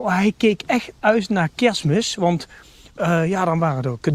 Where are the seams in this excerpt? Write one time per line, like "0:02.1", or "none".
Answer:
none